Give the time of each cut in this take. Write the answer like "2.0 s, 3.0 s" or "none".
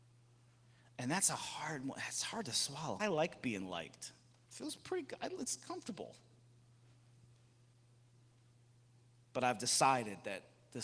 3.0 s